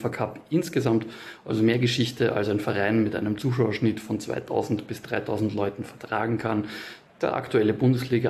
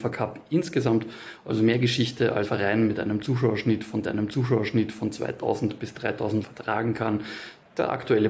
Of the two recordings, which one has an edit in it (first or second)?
second